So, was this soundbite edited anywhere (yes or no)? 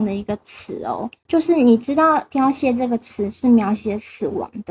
yes